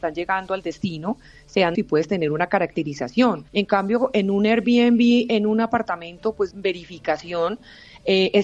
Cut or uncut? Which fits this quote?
cut